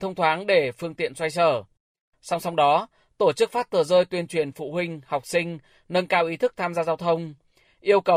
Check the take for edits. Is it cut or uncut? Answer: uncut